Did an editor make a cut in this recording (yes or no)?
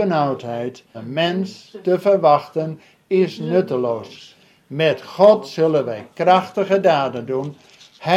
yes